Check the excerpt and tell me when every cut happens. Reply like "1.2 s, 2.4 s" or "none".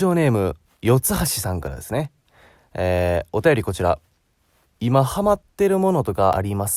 none